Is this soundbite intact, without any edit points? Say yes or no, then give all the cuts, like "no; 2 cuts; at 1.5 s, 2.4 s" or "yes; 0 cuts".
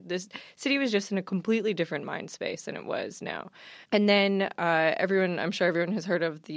no; 1 cut; at 3.8 s